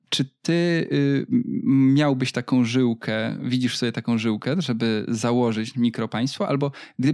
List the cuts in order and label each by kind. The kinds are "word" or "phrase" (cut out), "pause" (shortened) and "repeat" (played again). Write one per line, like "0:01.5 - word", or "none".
none